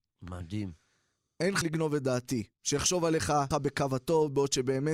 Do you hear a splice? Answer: yes; 3 cuts; at 1.6 s, 2.5 s, 3.5 s

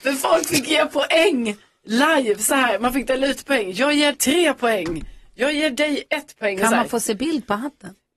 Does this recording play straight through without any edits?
no; 1 cut; at 4.1 s

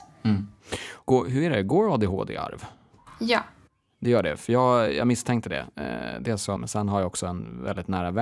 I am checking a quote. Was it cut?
yes; 1 cut; at 6.6 s

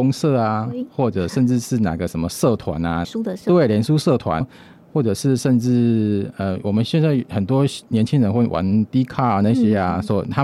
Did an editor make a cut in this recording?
yes; 2 cuts; at 3.0 s, 4.4 s

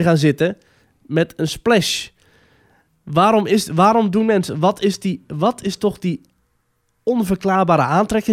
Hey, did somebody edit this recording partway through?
no; 0 cuts

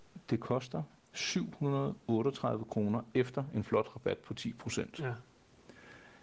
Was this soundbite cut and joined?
no; 0 cuts

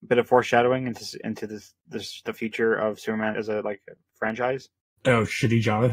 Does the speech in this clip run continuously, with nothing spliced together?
no; 1 cut; at 3.3 s

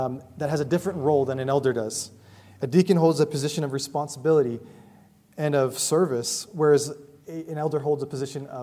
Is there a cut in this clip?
no; 0 cuts

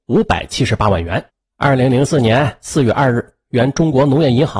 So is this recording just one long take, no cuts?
no; 1 cut; at 1.3 s

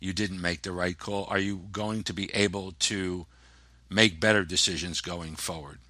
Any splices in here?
no; 0 cuts

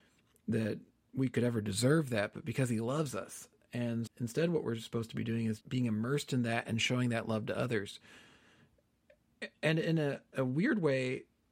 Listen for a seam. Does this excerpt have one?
yes; 2 cuts; at 4.1 s, 5.6 s

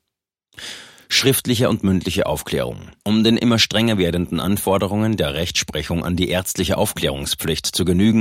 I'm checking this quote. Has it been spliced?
yes; 1 cut; at 3.0 s

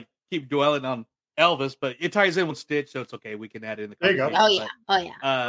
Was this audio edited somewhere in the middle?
yes; 1 cut; at 2.5 s

